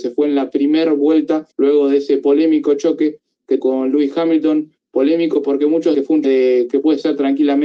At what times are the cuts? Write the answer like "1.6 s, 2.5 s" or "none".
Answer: 1.5 s, 3.6 s, 5.9 s, 6.2 s